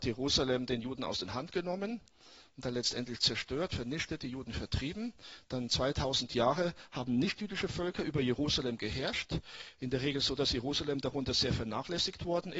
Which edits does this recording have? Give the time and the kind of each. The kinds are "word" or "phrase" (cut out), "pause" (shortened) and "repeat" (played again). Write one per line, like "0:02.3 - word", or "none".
none